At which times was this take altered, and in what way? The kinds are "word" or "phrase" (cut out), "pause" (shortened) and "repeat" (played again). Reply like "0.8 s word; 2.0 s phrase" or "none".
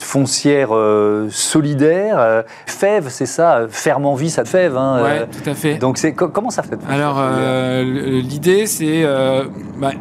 2.7 s word; 4.4 s word; 6.6 s word